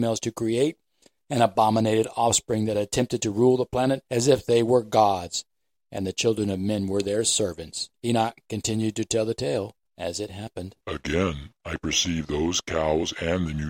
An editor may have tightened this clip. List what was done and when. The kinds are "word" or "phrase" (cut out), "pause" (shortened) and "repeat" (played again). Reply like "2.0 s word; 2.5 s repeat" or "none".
7.9 s pause; 10.8 s pause